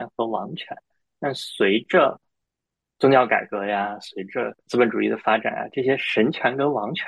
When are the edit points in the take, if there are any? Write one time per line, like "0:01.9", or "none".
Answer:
none